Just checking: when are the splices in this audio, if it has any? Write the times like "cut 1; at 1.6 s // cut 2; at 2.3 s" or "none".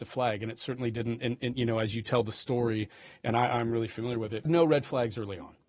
cut 1; at 4.5 s